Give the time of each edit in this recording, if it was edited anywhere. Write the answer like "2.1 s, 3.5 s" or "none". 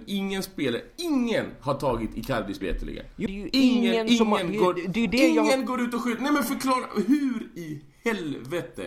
2.6 s, 3.3 s